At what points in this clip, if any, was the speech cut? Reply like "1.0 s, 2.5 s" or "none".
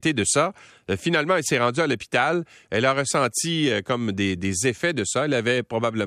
none